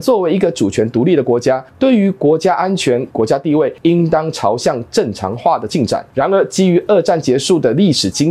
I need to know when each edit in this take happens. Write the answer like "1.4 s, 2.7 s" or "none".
3.1 s